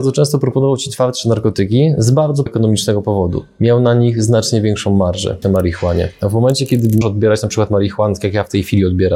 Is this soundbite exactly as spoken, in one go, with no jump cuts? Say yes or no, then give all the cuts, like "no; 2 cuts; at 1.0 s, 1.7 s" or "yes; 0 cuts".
no; 3 cuts; at 2.5 s, 5.4 s, 7.0 s